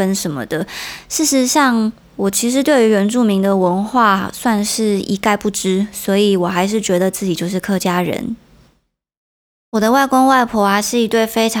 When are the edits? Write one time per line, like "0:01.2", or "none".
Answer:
none